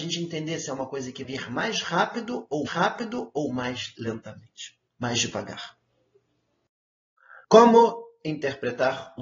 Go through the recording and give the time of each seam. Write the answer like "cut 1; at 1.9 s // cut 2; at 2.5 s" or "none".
cut 1; at 1.2 s // cut 2; at 2.7 s // cut 3; at 4.9 s // cut 4; at 7.4 s